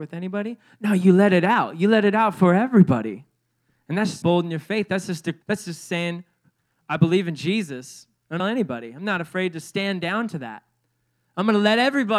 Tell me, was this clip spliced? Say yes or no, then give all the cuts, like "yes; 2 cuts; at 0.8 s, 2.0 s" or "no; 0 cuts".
yes; 3 cuts; at 4.2 s, 5.4 s, 8.4 s